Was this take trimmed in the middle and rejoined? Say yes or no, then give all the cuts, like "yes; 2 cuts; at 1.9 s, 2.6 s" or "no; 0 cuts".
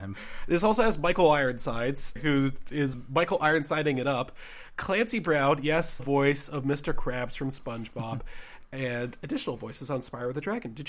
yes; 3 cuts; at 2.2 s, 2.9 s, 6.0 s